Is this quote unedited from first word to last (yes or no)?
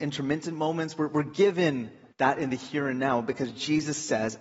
no